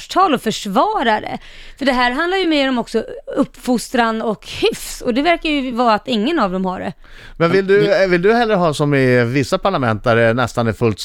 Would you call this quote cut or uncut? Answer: uncut